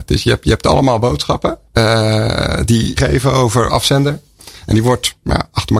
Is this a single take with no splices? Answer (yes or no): no